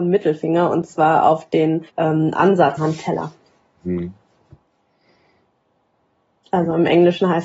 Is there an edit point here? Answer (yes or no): yes